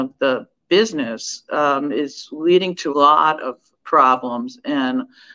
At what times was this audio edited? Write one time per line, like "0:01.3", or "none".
0:02.9
0:03.8